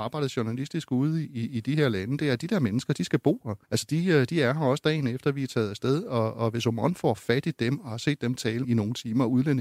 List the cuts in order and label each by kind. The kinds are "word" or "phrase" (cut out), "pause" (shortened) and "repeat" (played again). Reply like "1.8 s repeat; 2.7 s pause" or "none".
1.2 s word; 3.6 s pause; 8.6 s phrase